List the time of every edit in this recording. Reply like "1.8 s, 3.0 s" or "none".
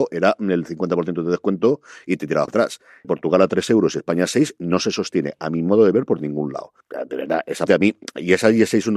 2.5 s, 3.0 s, 6.8 s, 7.7 s